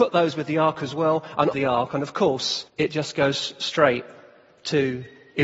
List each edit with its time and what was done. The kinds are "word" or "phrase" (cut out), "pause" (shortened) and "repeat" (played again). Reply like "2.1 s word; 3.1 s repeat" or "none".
1.5 s phrase; 2.7 s pause